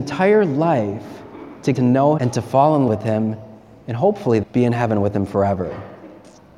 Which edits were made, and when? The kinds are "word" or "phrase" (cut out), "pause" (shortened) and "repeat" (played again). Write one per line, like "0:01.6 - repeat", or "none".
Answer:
0:01.7 - word
0:02.2 - word
0:02.9 - word
0:04.4 - word